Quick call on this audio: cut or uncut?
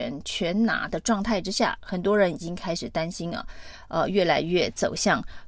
uncut